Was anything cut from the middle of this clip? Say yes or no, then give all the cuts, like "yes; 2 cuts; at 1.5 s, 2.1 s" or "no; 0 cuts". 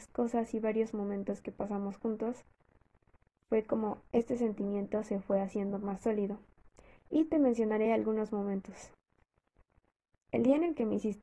no; 0 cuts